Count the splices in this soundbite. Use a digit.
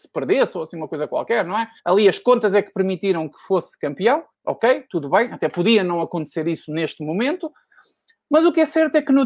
2